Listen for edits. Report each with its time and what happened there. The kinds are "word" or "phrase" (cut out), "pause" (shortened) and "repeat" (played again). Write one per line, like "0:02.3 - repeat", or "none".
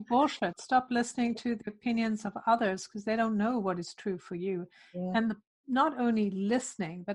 none